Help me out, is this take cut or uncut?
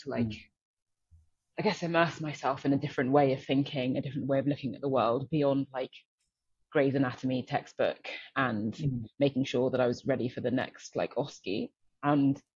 uncut